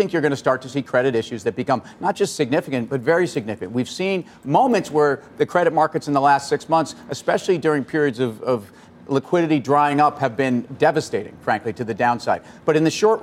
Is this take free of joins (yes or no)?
yes